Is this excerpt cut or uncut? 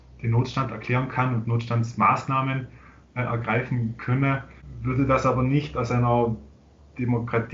uncut